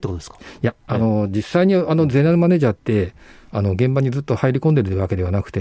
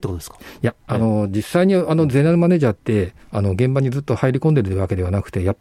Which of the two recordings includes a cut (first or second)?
second